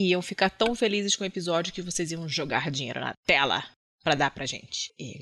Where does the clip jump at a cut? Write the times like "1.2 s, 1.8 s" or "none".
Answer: none